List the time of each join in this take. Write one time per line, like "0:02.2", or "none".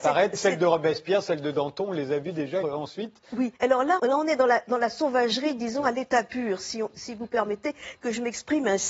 0:02.6
0:03.6
0:04.0